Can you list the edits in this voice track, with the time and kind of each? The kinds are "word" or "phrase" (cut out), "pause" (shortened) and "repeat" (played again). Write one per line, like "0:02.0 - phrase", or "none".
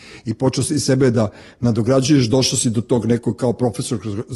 none